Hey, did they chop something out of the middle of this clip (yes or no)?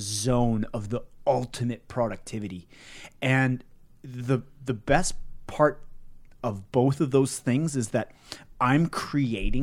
no